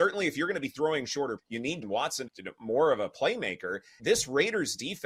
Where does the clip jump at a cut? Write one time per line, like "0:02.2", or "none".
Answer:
0:01.4
0:01.8
0:02.3
0:04.0